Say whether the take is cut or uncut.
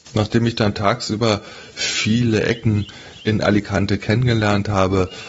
uncut